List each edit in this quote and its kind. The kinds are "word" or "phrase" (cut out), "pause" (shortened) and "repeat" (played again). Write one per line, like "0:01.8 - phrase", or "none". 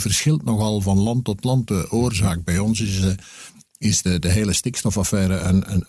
none